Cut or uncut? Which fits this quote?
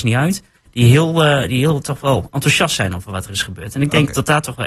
uncut